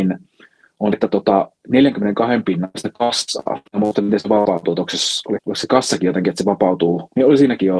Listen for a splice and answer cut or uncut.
cut